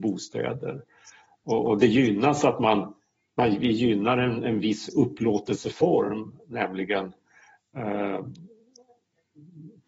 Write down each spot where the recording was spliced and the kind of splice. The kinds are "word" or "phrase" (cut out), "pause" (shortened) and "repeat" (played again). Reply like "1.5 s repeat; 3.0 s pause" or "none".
none